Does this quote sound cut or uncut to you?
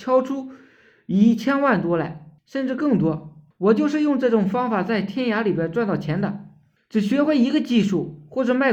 cut